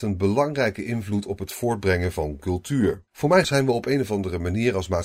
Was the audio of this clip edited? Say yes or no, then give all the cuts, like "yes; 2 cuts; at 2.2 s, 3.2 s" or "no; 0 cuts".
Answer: yes; 2 cuts; at 3.1 s, 3.4 s